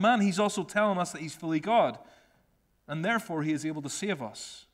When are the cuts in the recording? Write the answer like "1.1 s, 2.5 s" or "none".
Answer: none